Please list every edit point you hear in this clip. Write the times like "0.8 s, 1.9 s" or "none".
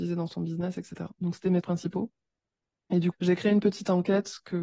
1.6 s, 3.1 s